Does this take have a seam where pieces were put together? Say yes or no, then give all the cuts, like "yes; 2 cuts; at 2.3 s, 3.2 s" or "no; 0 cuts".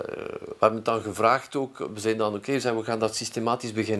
no; 0 cuts